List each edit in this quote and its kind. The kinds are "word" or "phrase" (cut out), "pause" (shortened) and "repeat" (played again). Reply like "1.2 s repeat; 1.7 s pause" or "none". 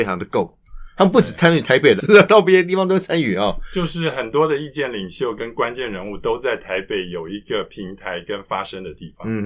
2.0 s word